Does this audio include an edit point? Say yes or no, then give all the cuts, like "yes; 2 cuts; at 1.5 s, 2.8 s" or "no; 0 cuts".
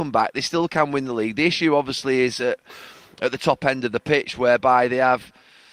no; 0 cuts